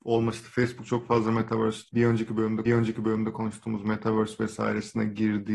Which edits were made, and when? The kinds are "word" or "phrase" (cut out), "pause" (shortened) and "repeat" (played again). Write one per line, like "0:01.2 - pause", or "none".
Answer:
0:01.9 - word
0:02.7 - repeat